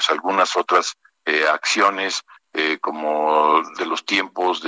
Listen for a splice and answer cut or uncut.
cut